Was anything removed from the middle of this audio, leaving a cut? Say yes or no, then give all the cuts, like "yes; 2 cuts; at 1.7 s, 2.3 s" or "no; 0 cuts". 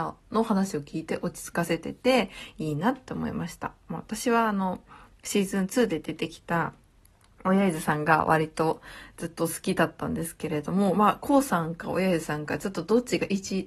no; 0 cuts